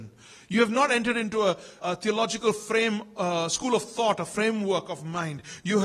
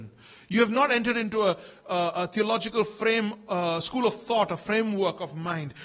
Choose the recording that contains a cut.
first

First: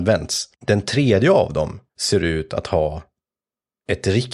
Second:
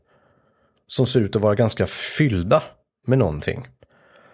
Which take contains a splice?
first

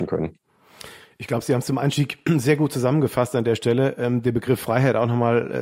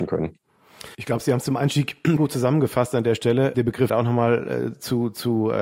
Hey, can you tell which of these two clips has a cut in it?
second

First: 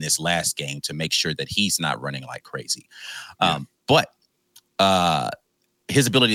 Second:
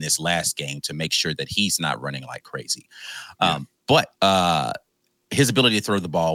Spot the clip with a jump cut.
second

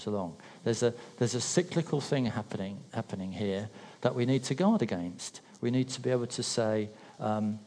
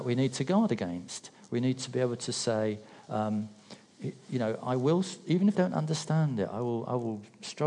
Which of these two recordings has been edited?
second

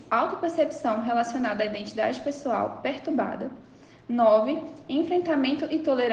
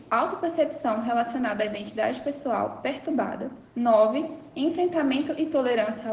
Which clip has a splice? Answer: second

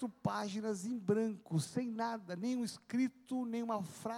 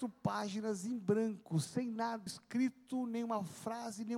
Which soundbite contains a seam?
second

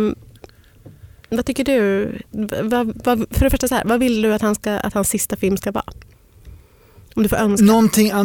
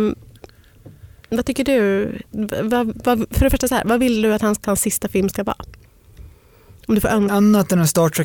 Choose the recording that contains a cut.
second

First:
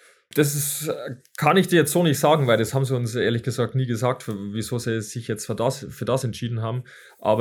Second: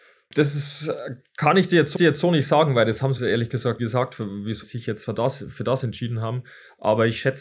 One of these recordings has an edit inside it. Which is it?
second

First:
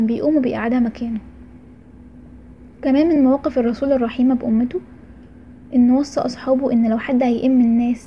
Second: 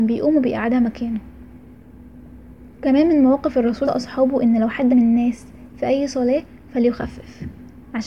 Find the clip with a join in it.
second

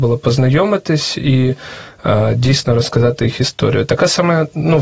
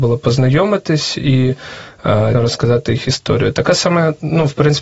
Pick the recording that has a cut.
second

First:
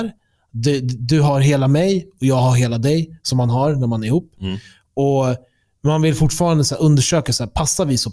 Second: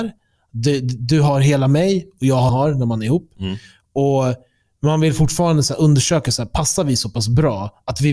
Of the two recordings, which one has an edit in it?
second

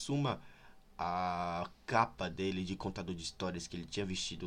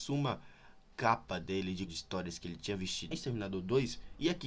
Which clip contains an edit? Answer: second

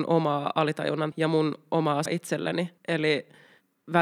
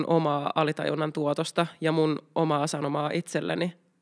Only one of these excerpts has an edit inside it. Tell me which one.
first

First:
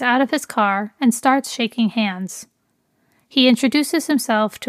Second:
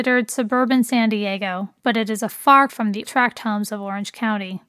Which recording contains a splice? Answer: second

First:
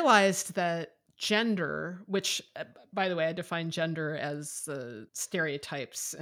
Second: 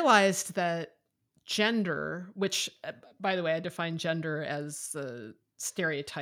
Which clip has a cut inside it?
first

